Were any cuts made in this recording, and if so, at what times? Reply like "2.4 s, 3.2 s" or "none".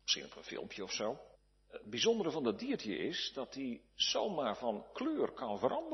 1.3 s